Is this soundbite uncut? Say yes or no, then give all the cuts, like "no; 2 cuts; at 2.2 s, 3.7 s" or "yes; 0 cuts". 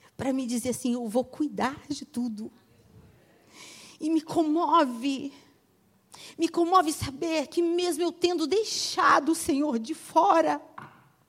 yes; 0 cuts